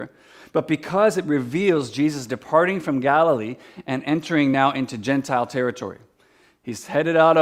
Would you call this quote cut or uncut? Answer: uncut